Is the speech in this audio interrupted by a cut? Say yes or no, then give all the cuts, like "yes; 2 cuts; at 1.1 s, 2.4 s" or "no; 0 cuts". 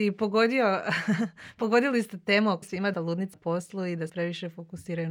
yes; 4 cuts; at 2.6 s, 2.9 s, 3.3 s, 4.1 s